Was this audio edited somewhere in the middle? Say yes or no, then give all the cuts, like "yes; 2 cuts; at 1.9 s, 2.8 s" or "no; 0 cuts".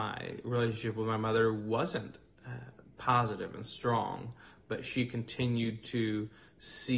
no; 0 cuts